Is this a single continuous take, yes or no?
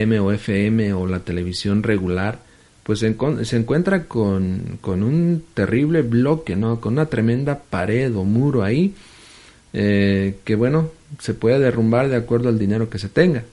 yes